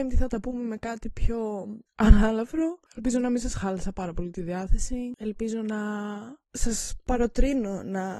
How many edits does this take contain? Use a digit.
0